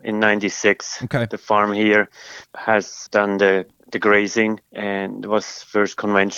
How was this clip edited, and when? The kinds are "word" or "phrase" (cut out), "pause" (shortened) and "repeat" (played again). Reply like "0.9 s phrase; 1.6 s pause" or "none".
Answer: 2.4 s word; 3.1 s word; 4.7 s pause

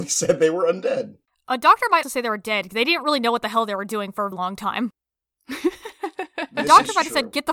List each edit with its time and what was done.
2.0 s word; 4.3 s word

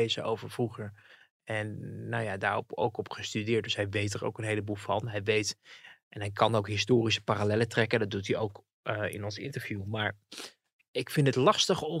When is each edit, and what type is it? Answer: none

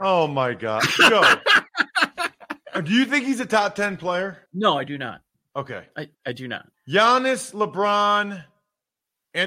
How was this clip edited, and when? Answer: 4.5 s pause; 5.3 s pause; 6.7 s pause

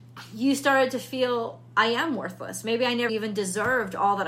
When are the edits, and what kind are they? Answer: 3.1 s word

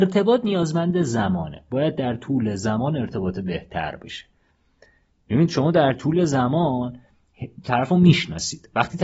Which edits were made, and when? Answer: none

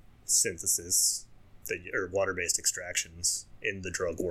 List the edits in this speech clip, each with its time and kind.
1.6 s pause

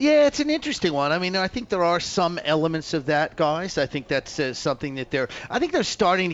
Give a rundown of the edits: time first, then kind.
none

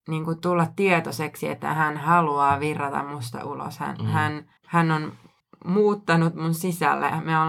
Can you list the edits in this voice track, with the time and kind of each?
4.6 s pause; 5.4 s pause

